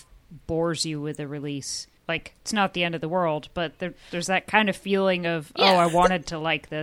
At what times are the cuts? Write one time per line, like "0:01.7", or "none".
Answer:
0:02.0